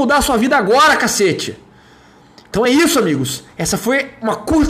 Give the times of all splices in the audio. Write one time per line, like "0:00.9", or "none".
none